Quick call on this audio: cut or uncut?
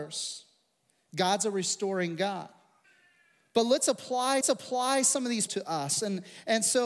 cut